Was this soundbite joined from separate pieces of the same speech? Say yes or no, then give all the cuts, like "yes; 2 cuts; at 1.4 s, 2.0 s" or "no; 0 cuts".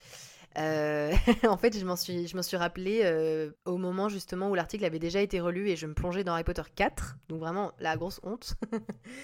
yes; 1 cut; at 3.6 s